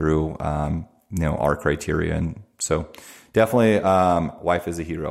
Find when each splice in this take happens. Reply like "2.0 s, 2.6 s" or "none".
none